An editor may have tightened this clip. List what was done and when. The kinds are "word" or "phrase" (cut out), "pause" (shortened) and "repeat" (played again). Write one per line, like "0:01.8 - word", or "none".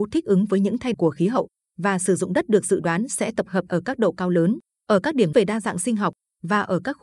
0:00.9 - word
0:03.7 - word
0:05.3 - word